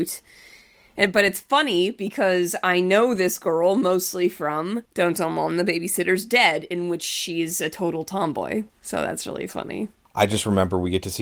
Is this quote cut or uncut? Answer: cut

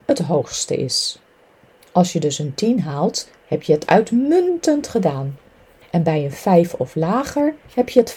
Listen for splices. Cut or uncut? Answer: uncut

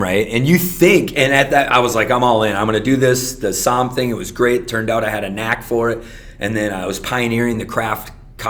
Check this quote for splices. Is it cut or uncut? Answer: uncut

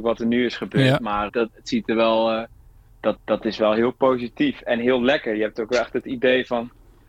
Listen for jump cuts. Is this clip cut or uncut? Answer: cut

